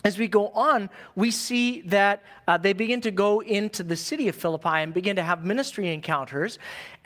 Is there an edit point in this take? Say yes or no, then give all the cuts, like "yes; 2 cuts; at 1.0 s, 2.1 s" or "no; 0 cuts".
no; 0 cuts